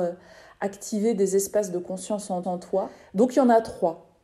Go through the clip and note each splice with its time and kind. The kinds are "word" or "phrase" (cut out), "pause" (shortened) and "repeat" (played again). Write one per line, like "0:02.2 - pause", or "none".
0:02.4 - repeat